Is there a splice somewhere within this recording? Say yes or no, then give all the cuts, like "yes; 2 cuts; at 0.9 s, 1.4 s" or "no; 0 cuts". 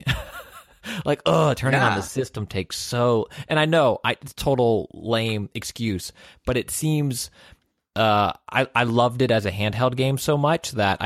no; 0 cuts